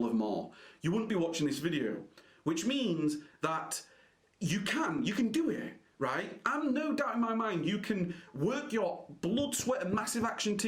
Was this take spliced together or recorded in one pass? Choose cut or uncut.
uncut